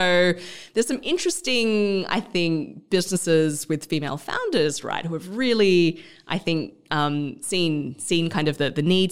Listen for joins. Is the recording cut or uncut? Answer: uncut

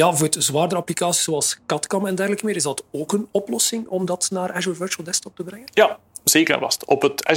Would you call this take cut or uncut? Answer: uncut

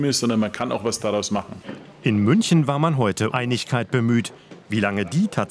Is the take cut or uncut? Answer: cut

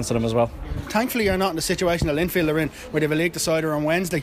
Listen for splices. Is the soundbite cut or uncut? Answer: uncut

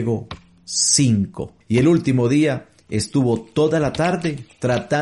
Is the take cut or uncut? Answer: cut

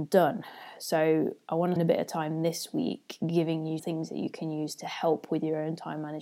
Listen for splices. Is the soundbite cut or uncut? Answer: cut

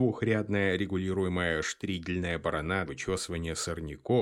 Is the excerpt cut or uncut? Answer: cut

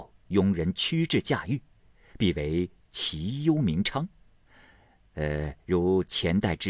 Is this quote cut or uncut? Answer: cut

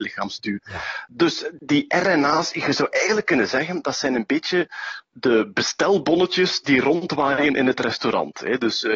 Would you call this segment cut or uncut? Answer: uncut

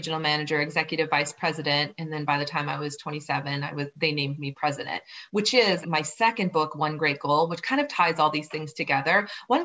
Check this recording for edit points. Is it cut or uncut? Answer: cut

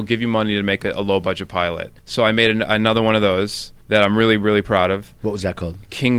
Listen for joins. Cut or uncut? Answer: cut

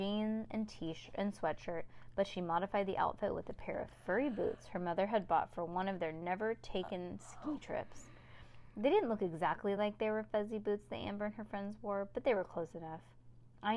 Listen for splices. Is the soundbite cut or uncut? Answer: uncut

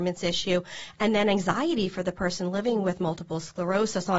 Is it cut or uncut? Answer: uncut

